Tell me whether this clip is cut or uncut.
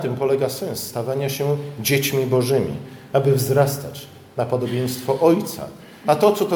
uncut